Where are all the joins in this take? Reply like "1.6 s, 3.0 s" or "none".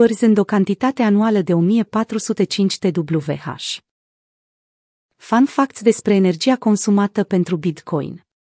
none